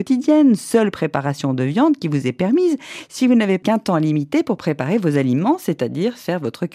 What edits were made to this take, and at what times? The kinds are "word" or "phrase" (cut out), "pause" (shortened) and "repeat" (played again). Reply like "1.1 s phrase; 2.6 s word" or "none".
none

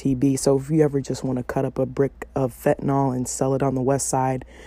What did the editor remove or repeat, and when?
none

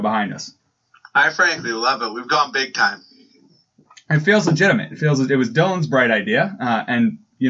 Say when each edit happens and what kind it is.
none

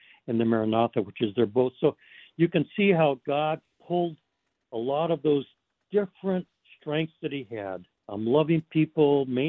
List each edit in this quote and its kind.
7.9 s pause

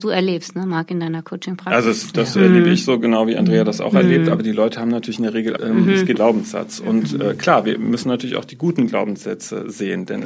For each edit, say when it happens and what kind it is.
5.6 s phrase; 6.2 s word

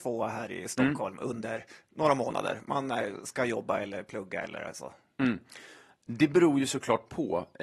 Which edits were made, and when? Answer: none

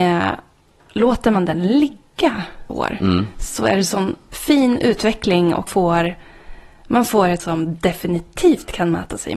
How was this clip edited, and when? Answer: 2.7 s word; 5.7 s word; 7.4 s word

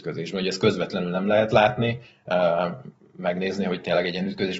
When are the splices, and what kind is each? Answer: none

